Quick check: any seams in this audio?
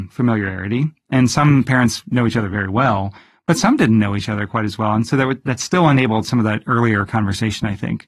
no; 0 cuts

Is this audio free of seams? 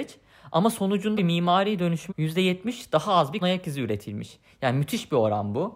no; 3 cuts; at 1.2 s, 2.1 s, 3.4 s

